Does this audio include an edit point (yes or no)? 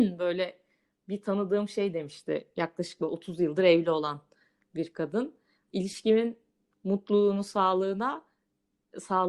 no